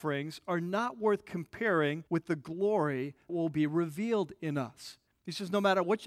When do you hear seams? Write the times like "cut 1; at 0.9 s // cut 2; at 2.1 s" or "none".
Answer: cut 1; at 2.1 s // cut 2; at 3.3 s // cut 3; at 5.1 s